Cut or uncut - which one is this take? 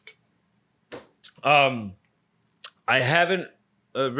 uncut